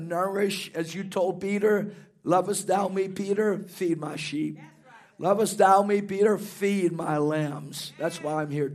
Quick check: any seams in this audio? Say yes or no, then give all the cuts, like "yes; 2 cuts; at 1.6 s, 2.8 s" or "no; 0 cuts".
no; 0 cuts